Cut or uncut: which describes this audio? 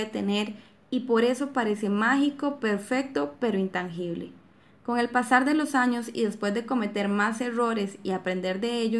uncut